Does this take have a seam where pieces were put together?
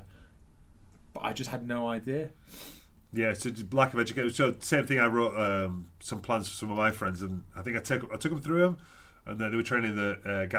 no; 0 cuts

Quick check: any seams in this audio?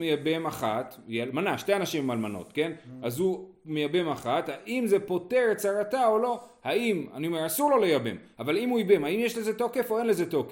no; 0 cuts

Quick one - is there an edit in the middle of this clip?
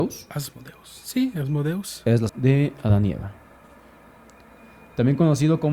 yes; 1 cut; at 2.3 s

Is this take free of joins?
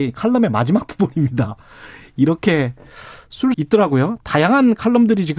no; 1 cut; at 3.5 s

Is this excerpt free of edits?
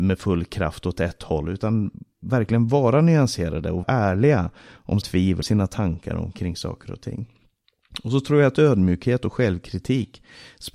no; 3 cuts; at 3.8 s, 5.0 s, 5.4 s

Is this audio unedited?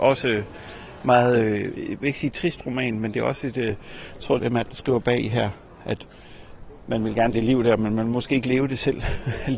no; 3 cuts; at 2.0 s, 4.4 s, 7.3 s

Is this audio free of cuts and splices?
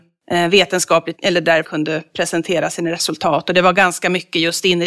no; 2 cuts; at 1.1 s, 1.6 s

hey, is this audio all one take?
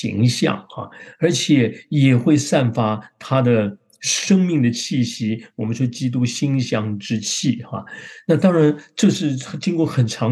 yes; 0 cuts

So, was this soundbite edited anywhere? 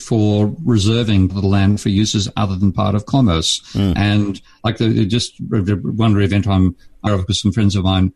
yes; 2 cuts; at 1.3 s, 7.1 s

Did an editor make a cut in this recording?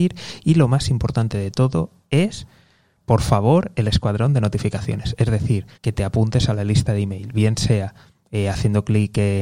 yes; 1 cut; at 5.8 s

